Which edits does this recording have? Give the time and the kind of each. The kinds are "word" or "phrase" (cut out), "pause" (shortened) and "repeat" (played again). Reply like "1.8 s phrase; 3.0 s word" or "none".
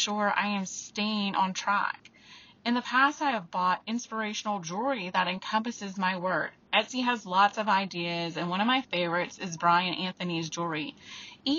none